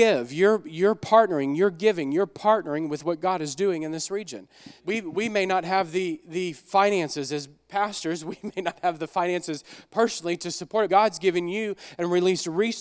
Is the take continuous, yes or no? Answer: no